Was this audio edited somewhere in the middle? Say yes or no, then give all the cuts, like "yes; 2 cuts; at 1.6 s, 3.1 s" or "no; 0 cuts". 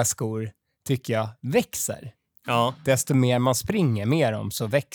no; 0 cuts